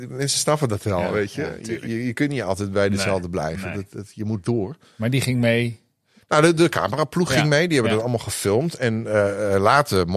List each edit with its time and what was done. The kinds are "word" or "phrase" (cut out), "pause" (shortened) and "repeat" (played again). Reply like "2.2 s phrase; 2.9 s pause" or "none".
none